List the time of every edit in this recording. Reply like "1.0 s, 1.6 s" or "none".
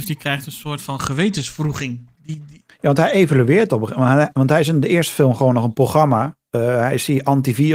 2.2 s